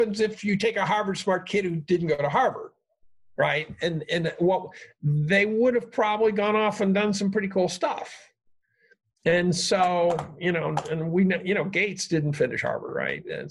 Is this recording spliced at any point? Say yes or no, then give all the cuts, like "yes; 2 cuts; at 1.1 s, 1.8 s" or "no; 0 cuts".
no; 0 cuts